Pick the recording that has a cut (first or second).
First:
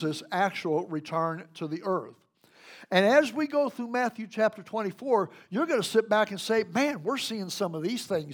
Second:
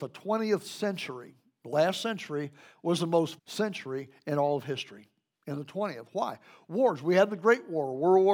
second